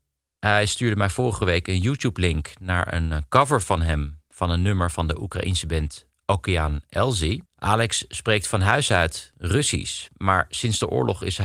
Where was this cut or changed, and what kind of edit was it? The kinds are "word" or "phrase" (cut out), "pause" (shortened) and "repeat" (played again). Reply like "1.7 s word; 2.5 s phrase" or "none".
7.5 s pause